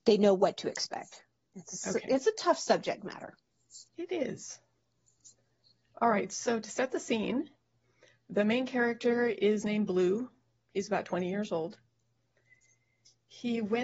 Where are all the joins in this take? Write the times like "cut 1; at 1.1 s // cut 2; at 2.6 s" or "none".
cut 1; at 3.9 s